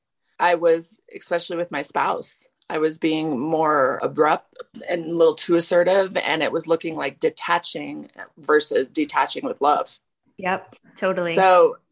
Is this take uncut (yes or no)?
yes